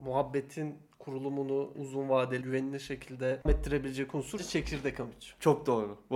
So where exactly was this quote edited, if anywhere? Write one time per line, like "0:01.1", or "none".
0:01.7
0:02.4
0:03.5
0:04.4